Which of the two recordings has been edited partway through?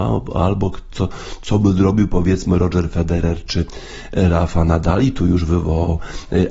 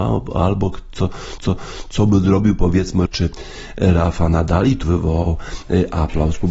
second; 3 cuts; at 1.4 s, 3.1 s, 4.8 s

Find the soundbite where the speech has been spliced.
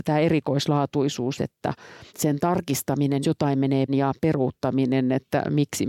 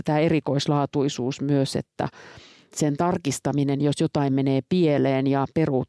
first; 4 cuts; at 1.4 s, 2.1 s, 3.2 s, 3.9 s

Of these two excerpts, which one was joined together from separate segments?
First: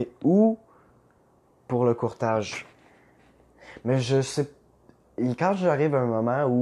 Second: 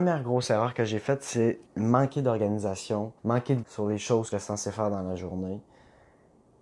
second; 4 cuts; at 1.7 s, 3.2 s, 3.6 s, 4.3 s

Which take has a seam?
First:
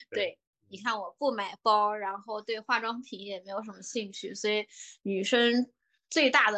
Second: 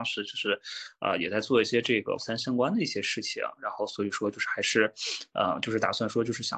second; 1 cut; at 2.2 s

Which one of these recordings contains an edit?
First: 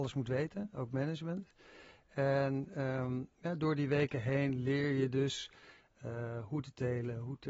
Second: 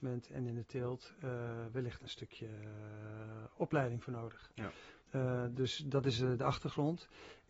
second; 1 cut; at 5.0 s

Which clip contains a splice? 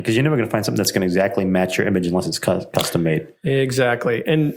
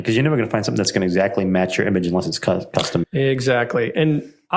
second; 1 cut; at 3.0 s

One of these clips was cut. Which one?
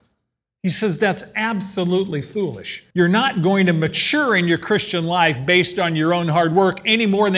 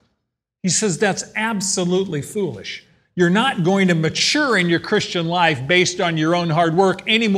first; 1 cut; at 2.9 s

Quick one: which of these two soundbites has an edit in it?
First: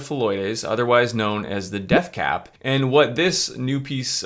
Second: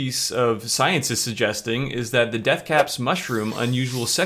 first; 1 cut; at 2.6 s

